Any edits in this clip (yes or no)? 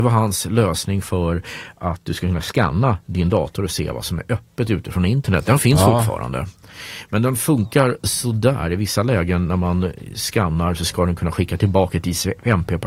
no